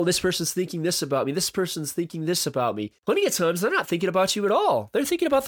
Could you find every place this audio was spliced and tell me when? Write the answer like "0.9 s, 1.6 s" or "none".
3.0 s